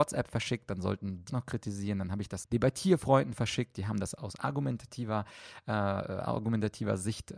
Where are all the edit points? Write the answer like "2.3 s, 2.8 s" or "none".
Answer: 1.3 s, 2.4 s